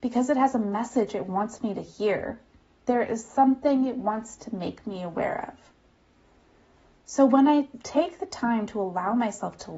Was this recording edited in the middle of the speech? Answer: no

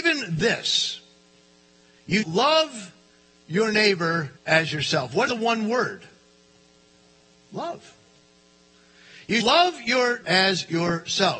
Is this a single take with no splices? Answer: no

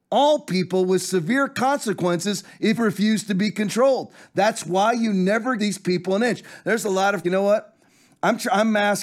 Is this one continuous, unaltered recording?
no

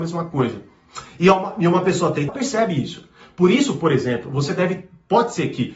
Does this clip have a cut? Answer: yes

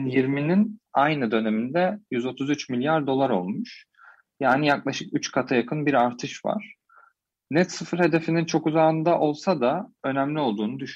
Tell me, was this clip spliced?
no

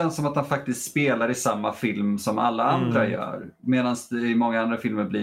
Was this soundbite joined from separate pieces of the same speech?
no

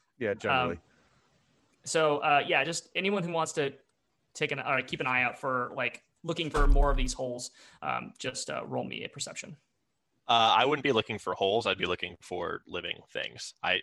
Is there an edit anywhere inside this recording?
no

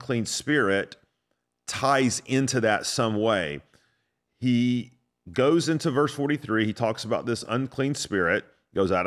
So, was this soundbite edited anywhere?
no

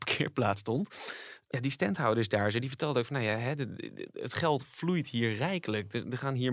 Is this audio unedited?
yes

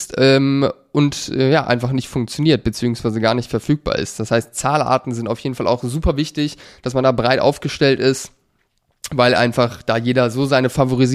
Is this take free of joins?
yes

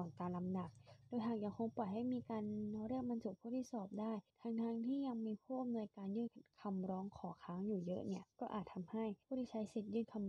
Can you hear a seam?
yes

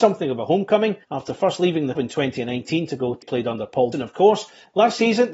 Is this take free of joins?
no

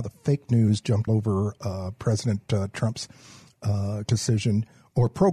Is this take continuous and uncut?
no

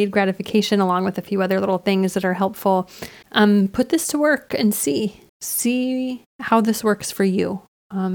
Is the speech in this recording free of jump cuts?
no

